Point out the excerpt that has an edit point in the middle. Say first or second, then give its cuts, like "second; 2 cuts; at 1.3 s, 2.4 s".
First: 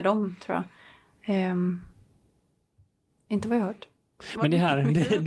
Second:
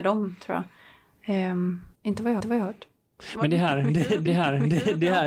second; 3 cuts; at 1.9 s, 2.4 s, 4.3 s